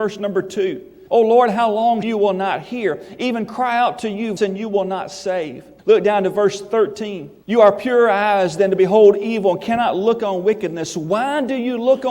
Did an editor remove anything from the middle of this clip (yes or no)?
yes